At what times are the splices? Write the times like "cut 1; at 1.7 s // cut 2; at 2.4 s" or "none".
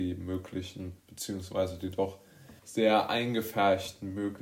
cut 1; at 1.0 s // cut 2; at 2.6 s